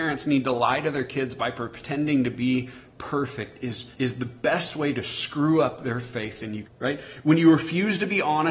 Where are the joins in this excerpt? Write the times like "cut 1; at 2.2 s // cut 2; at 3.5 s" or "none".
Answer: cut 1; at 3.9 s // cut 2; at 6.6 s